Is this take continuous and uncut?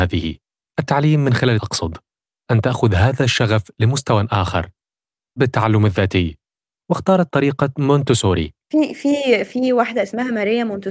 no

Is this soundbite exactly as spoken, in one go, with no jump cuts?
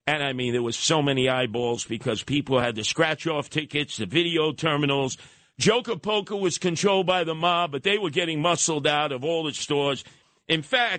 yes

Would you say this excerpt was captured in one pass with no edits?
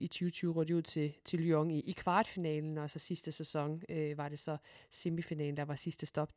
yes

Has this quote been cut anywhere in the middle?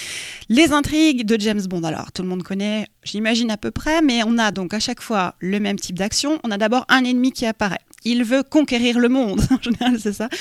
no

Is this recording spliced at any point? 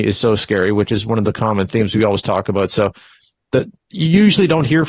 no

